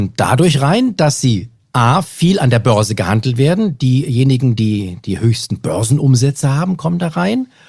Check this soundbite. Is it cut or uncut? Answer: uncut